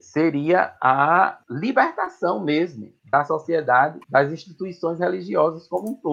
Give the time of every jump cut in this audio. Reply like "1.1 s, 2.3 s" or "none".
1.4 s, 3.0 s, 4.0 s